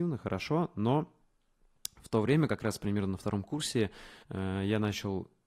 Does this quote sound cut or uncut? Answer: cut